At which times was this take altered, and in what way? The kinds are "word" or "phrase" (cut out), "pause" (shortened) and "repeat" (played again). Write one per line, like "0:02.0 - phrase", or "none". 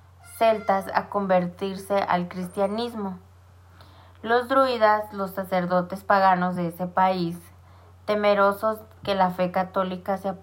none